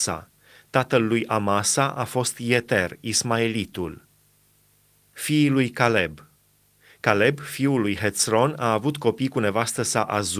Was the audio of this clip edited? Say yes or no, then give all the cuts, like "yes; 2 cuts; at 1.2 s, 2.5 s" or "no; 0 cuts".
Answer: no; 0 cuts